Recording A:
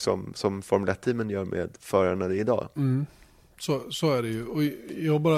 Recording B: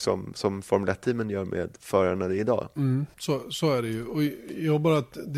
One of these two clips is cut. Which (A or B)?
B